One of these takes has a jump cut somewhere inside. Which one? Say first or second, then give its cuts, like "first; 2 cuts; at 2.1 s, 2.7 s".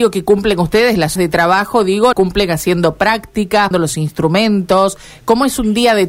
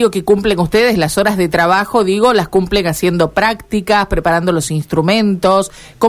first; 3 cuts; at 1.2 s, 2.1 s, 3.7 s